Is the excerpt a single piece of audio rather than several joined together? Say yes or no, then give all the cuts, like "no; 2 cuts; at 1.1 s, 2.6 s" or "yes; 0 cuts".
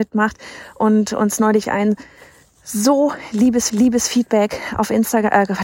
no; 2 cuts; at 1.6 s, 3.7 s